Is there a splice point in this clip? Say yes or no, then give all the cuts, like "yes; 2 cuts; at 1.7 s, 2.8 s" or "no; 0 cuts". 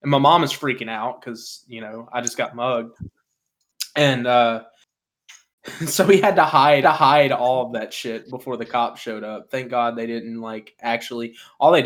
yes; 1 cut; at 6.8 s